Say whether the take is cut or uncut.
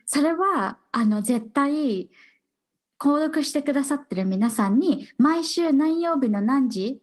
uncut